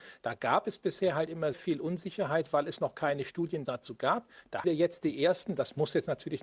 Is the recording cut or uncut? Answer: cut